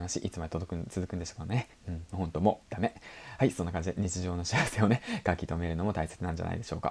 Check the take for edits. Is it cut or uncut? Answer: cut